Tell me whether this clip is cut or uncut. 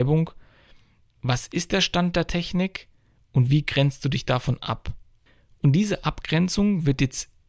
uncut